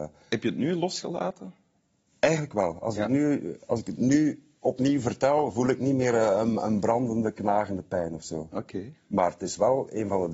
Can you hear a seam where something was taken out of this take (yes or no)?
no